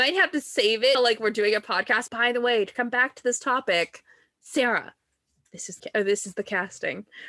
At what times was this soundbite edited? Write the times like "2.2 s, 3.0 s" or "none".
0.9 s, 2.1 s, 5.8 s